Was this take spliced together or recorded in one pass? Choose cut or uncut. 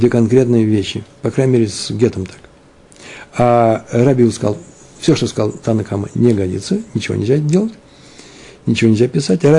uncut